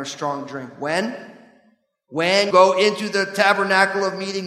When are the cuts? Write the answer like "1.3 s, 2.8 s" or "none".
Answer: 2.5 s